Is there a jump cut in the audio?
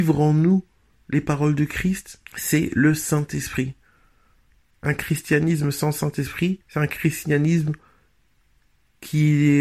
yes; 2 cuts; at 2.3 s, 6.6 s

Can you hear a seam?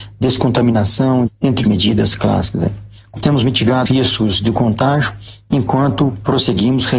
yes; 4 cuts; at 1.3 s, 1.6 s, 3.2 s, 3.9 s

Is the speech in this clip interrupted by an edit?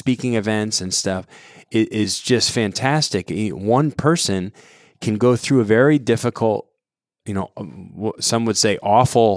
no; 0 cuts

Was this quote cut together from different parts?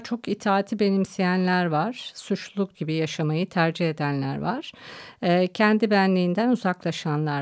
yes; 1 cut; at 2.7 s

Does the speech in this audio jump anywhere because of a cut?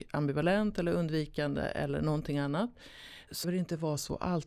yes; 1 cut; at 3.4 s

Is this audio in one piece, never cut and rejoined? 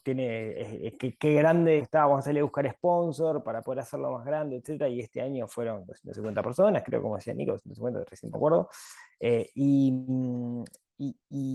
no; 3 cuts; at 1.2 s, 1.8 s, 8.3 s

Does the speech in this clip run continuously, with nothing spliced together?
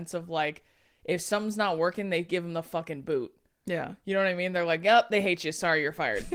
yes; 0 cuts

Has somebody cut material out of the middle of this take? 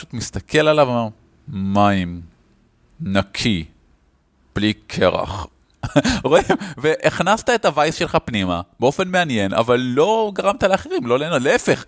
no; 0 cuts

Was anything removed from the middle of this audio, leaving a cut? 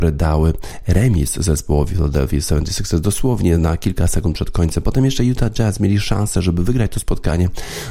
no; 0 cuts

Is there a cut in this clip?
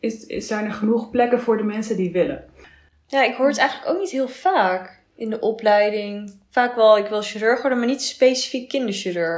no; 0 cuts

